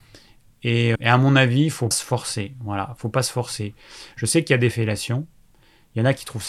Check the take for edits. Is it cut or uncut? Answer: cut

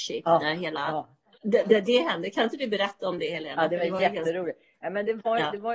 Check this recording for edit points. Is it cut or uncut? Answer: uncut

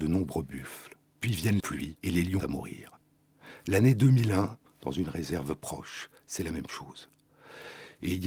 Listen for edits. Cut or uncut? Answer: cut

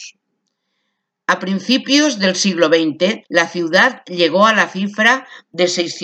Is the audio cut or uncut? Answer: cut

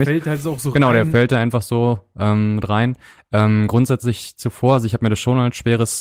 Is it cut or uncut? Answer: uncut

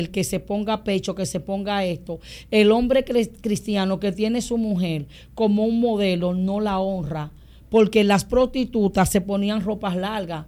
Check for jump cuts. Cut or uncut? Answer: uncut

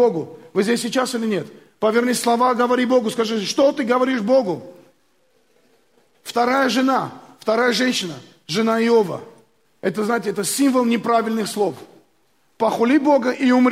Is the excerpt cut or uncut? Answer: uncut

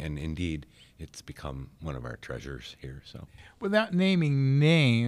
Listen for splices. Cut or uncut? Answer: uncut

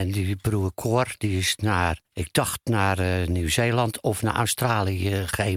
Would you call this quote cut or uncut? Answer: cut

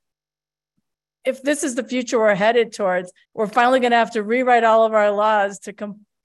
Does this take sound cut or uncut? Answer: cut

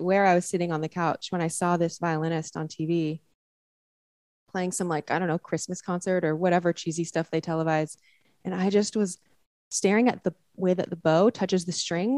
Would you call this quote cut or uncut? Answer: uncut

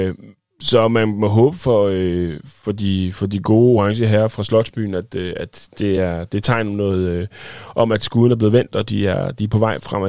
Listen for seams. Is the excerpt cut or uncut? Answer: uncut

